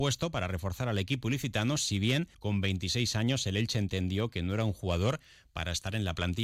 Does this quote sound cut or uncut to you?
cut